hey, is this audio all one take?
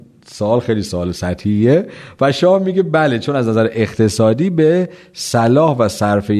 yes; 0 cuts

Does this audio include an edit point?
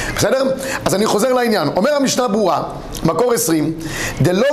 no; 0 cuts

